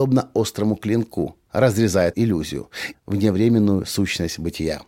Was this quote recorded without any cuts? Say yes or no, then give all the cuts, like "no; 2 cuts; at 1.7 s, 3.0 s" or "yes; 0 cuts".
no; 2 cuts; at 2.1 s, 2.9 s